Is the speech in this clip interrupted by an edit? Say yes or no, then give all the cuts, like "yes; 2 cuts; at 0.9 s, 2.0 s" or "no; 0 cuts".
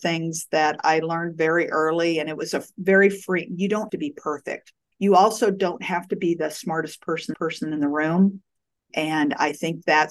yes; 3 cuts; at 3.9 s, 4.9 s, 7.3 s